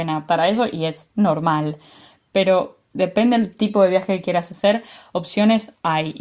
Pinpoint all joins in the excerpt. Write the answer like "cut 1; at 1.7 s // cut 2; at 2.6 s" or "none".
none

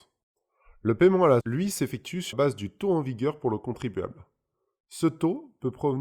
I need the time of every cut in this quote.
cut 1; at 1.4 s // cut 2; at 2.3 s

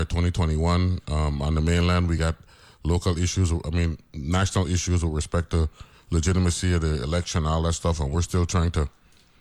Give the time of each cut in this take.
none

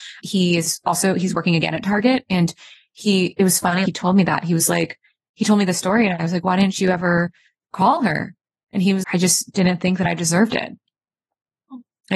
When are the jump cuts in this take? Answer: cut 1; at 3.9 s // cut 2; at 9.0 s

